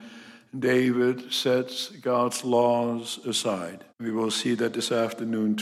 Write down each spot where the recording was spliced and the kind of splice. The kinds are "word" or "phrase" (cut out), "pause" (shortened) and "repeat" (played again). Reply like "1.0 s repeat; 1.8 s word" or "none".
3.9 s pause